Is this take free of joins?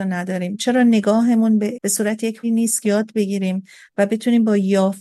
no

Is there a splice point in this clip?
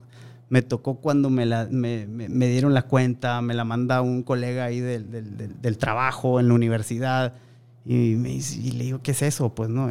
no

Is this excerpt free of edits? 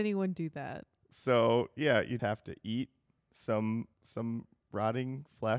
no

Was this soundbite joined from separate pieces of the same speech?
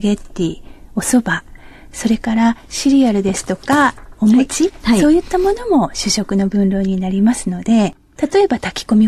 no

